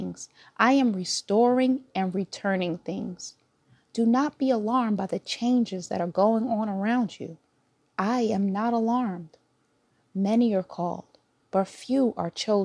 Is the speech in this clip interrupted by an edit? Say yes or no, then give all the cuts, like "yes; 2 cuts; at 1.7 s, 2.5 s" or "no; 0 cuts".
no; 0 cuts